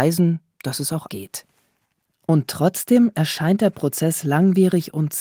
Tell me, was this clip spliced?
yes; 1 cut; at 1.1 s

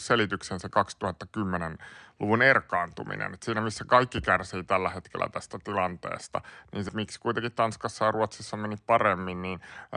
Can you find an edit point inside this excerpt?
yes; 1 cut; at 6.9 s

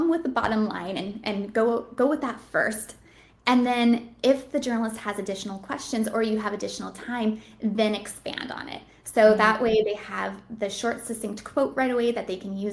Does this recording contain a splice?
no; 0 cuts

